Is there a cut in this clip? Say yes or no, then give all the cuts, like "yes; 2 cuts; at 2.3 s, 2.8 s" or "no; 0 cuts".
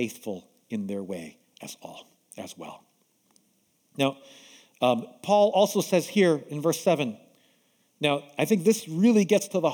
no; 0 cuts